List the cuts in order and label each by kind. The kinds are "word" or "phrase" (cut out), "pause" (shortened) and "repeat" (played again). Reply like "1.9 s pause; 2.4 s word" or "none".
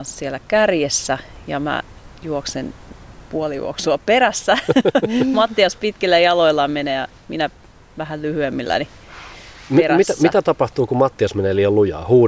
none